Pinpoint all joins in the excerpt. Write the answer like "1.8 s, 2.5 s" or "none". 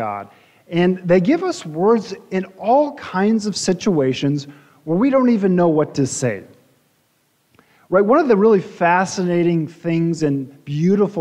none